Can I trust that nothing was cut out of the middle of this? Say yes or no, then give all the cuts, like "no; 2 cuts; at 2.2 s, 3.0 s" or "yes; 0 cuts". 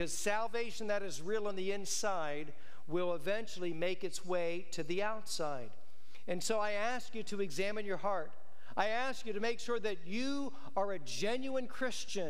yes; 0 cuts